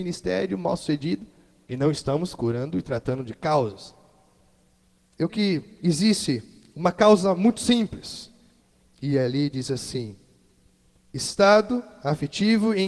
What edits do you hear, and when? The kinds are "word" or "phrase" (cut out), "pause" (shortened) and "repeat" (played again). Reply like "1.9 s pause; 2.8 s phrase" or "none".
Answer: 5.3 s word